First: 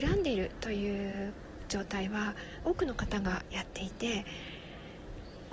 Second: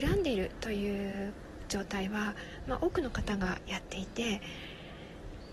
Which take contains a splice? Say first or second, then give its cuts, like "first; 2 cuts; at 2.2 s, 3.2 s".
first; 1 cut; at 2.6 s